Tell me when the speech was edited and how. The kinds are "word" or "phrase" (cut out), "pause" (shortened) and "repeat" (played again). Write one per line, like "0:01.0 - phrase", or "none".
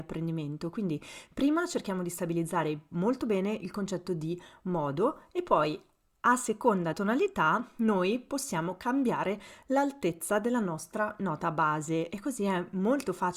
0:06.9 - word